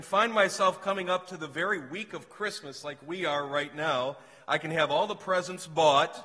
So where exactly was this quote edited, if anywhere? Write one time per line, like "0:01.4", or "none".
none